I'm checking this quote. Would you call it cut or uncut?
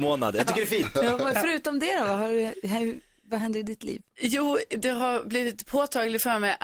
uncut